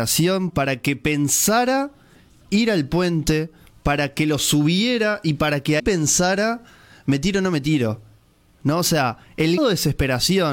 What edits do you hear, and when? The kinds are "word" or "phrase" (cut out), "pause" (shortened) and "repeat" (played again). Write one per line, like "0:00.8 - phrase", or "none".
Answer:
0:05.8 - word
0:09.6 - word